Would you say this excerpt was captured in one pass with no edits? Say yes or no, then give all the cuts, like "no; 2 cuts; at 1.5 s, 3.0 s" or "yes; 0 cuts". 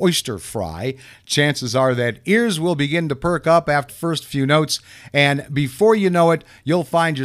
no; 1 cut; at 3.9 s